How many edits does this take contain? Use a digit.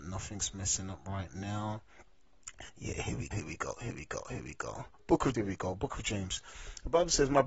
4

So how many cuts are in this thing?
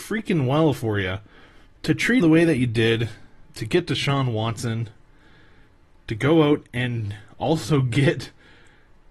3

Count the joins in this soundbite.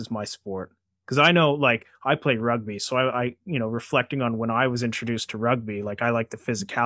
0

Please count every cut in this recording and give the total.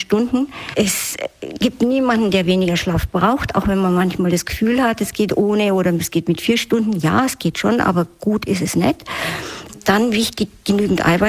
0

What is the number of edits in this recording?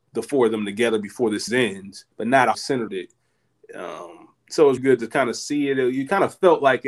6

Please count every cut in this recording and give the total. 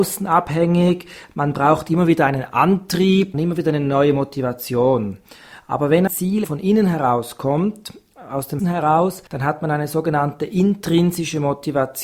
5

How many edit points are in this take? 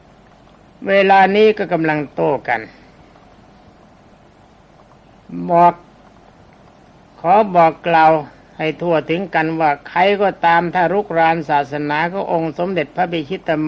0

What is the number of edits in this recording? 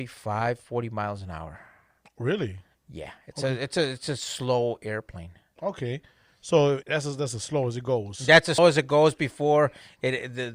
2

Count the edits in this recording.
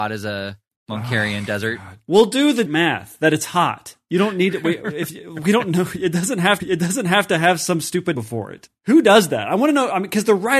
3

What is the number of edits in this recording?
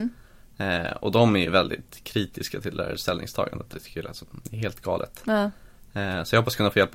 0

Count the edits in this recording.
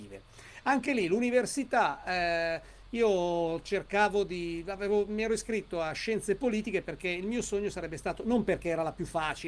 0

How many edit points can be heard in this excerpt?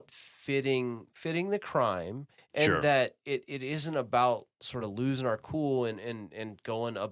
0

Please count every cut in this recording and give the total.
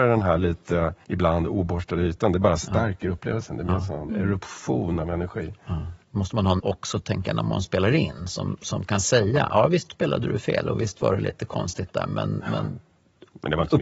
4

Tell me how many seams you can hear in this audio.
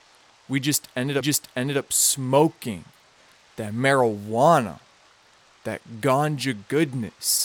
1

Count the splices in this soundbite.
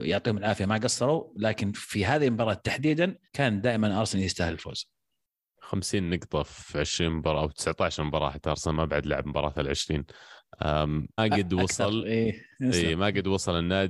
3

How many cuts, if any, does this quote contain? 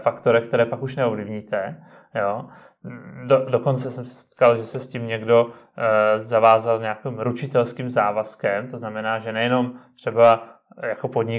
0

